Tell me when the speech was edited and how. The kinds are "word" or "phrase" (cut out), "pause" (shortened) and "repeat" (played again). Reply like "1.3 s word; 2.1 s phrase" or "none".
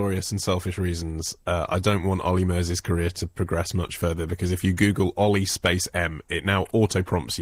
none